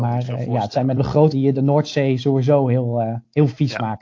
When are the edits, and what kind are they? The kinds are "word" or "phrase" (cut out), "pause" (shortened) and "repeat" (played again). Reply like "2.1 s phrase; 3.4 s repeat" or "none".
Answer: 1.0 s word; 1.3 s word